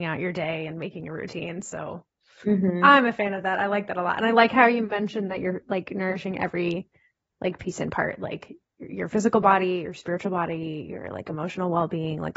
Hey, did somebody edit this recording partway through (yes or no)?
no